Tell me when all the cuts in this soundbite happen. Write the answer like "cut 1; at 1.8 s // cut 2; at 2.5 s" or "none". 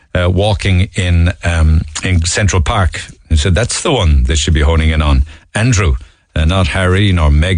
none